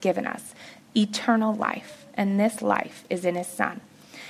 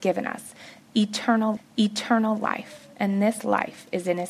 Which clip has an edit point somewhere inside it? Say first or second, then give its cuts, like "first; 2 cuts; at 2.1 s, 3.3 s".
second; 1 cut; at 1.6 s